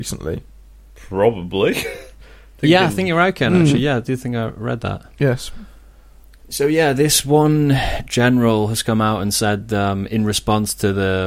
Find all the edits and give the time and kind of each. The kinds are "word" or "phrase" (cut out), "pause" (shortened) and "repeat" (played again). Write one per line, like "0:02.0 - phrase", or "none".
none